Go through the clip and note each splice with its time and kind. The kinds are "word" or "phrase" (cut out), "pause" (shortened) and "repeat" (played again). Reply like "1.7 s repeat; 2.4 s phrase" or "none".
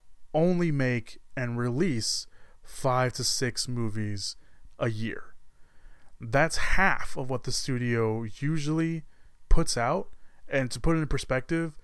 9.4 s pause